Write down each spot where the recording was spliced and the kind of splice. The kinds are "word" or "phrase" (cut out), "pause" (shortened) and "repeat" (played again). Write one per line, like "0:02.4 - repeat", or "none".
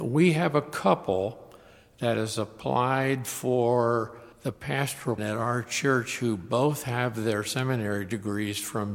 0:04.3 - pause
0:05.2 - word